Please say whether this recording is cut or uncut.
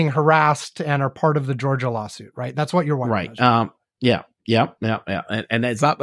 uncut